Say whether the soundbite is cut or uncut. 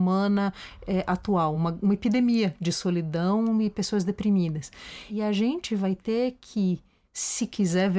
uncut